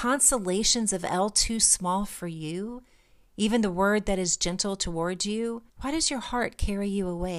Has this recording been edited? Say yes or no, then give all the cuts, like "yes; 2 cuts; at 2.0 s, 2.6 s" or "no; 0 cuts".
yes; 1 cut; at 5.7 s